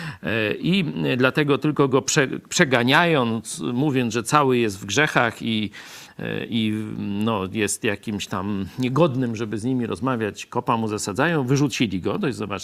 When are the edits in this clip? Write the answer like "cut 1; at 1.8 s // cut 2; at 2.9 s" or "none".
none